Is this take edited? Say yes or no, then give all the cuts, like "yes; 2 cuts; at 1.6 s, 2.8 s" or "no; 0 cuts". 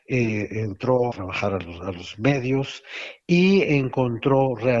yes; 1 cut; at 1.1 s